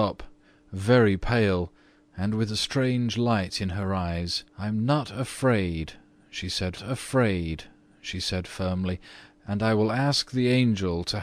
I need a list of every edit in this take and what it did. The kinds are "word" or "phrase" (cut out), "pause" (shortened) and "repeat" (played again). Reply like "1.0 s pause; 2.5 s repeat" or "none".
4.5 s pause; 6.8 s repeat